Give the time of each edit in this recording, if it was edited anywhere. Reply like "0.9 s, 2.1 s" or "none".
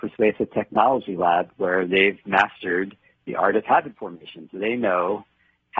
none

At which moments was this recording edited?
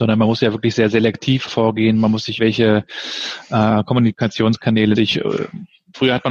1.5 s, 2.4 s, 4.9 s

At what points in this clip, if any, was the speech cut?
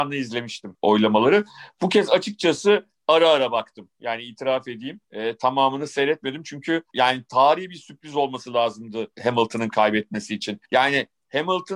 5.0 s, 9.1 s, 10.6 s

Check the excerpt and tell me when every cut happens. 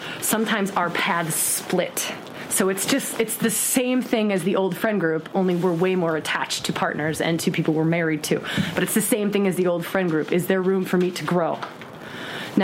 none

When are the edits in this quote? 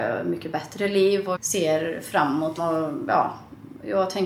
1.3 s, 2.6 s

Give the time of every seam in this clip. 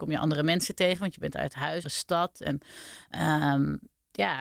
1.8 s

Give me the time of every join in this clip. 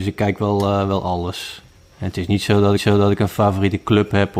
2.8 s

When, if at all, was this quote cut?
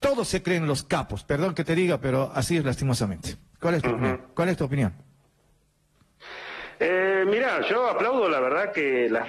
3.5 s

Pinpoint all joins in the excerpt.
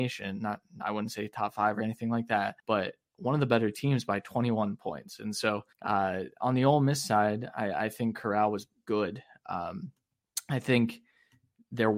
2.6 s, 5.7 s

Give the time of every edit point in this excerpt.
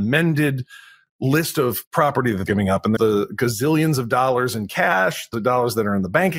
2.5 s, 3.0 s, 5.3 s

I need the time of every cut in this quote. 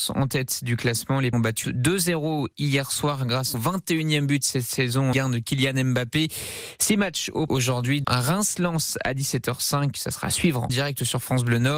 1.3 s, 1.6 s, 3.5 s, 5.1 s, 7.5 s, 8.0 s, 10.7 s

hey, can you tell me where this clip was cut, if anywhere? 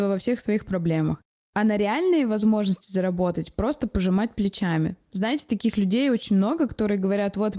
none

